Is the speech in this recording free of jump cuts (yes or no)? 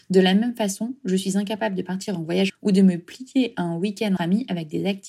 no